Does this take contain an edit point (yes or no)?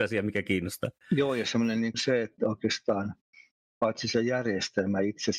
yes